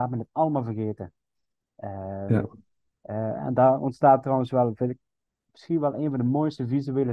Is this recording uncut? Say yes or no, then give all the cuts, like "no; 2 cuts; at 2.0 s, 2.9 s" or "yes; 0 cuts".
yes; 0 cuts